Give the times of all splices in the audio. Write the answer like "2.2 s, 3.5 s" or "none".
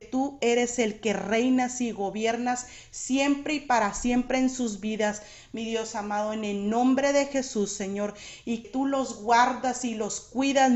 8.6 s

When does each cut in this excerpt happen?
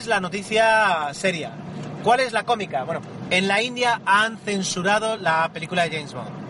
none

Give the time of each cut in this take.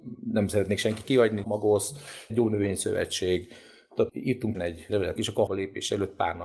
1.0 s, 1.4 s, 2.3 s, 4.1 s, 4.5 s, 5.2 s, 5.5 s

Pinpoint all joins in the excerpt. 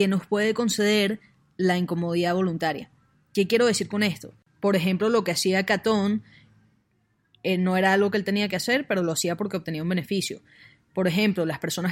none

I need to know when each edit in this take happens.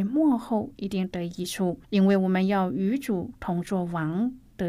1.8 s

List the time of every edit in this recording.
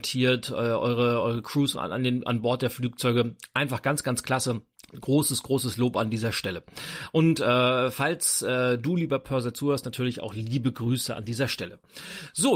1.8 s, 4.8 s

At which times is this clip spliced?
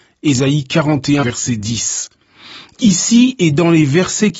1.2 s

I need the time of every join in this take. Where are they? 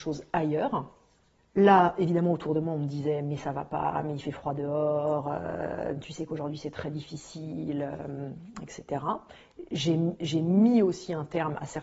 none

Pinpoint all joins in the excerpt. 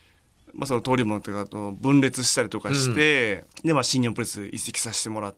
3.5 s

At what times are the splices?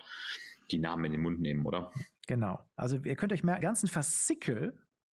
3.6 s

